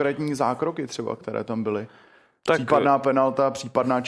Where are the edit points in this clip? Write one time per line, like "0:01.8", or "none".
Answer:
none